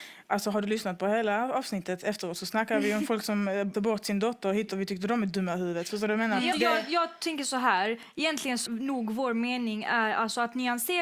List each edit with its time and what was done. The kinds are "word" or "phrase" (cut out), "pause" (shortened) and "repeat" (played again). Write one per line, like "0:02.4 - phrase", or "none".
0:03.7 - word
0:04.7 - word
0:06.5 - word
0:08.7 - word